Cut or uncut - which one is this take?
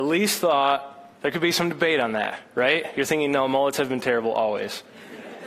cut